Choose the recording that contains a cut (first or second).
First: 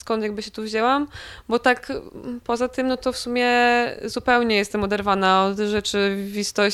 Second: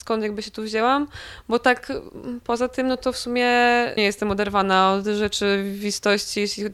second